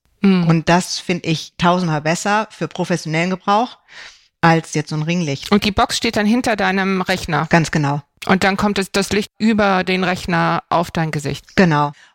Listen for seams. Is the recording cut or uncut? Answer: uncut